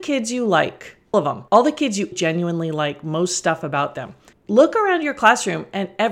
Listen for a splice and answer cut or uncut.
cut